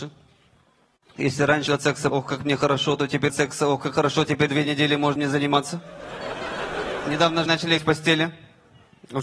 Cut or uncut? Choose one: cut